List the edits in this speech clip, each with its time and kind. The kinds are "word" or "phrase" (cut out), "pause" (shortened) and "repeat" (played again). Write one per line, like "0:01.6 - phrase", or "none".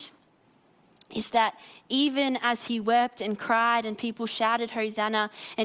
none

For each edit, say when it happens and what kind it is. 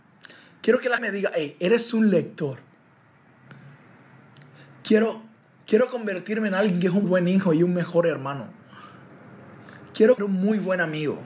0:01.0 - word
0:07.0 - word
0:10.2 - word

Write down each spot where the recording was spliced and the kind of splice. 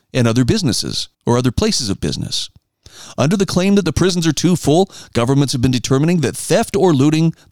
0:01.1 - pause

